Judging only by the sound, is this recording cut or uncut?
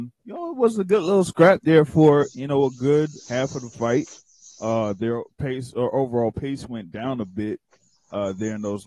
cut